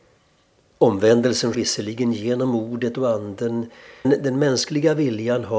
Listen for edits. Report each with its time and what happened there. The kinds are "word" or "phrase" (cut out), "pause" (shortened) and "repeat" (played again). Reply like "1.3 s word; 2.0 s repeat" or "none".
1.5 s word; 4.0 s word